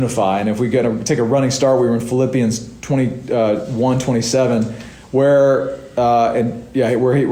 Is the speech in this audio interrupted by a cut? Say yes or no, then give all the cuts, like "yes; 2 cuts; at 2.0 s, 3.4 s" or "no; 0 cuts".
yes; 1 cut; at 5.0 s